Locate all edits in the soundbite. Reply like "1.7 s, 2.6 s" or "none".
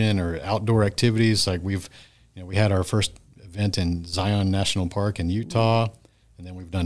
none